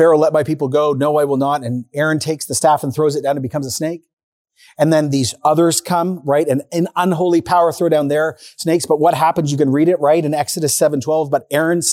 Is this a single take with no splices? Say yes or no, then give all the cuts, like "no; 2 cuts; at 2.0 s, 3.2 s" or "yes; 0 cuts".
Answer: yes; 0 cuts